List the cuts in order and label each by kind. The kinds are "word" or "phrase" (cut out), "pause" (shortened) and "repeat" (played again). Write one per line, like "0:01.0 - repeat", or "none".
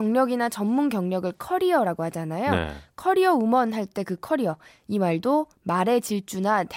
none